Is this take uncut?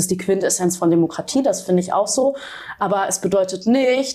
yes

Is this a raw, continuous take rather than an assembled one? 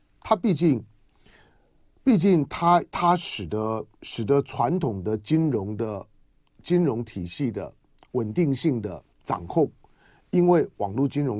no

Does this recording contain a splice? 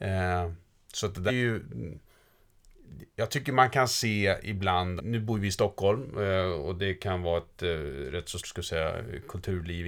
yes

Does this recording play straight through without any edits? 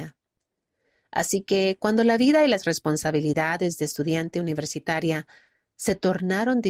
yes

